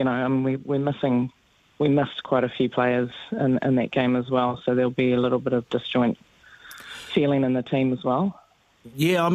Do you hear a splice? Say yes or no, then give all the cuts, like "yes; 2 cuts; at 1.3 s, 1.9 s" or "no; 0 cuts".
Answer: no; 0 cuts